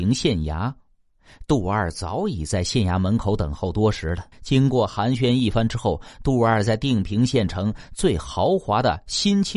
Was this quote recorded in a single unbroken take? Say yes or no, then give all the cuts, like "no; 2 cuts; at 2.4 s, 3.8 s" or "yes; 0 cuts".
no; 1 cut; at 4.3 s